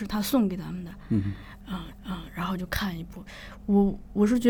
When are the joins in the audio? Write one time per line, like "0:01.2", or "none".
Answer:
0:01.9